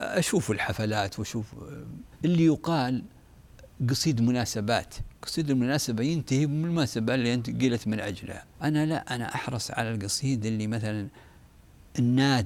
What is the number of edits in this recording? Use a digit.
3